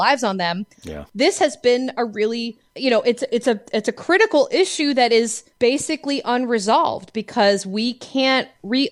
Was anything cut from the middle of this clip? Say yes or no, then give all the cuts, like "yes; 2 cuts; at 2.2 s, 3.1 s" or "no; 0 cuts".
yes; 2 cuts; at 2.7 s, 5.5 s